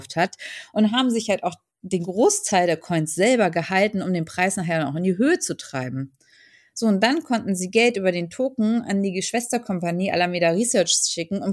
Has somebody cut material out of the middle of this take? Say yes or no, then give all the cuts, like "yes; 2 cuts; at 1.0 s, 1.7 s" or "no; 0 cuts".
no; 0 cuts